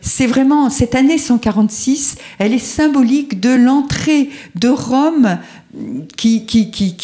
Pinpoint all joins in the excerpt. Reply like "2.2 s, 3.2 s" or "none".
none